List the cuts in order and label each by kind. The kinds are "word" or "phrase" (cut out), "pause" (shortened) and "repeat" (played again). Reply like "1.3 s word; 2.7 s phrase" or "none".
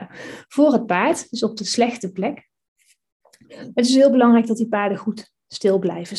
none